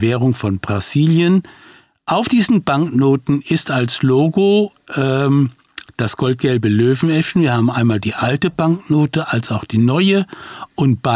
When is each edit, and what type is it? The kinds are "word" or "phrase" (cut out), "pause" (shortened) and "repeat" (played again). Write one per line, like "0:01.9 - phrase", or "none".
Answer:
none